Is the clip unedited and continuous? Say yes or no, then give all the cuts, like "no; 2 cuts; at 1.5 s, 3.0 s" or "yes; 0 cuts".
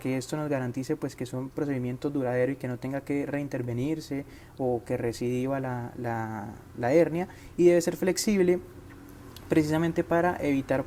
yes; 0 cuts